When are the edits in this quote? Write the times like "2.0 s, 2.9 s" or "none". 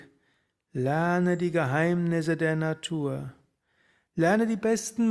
none